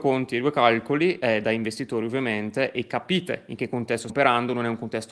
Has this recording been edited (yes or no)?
yes